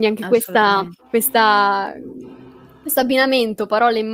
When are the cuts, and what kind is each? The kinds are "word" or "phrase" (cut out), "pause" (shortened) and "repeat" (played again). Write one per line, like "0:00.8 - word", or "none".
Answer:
0:01.0 - pause